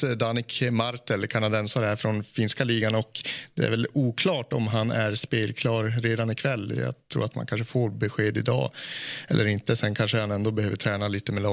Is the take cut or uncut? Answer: uncut